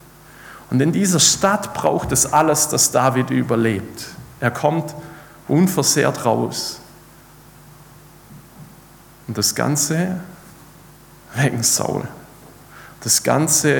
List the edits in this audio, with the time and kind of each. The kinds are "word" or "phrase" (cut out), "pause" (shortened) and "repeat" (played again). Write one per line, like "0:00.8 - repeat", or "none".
none